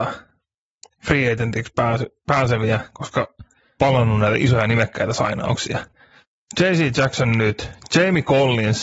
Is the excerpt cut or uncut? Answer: cut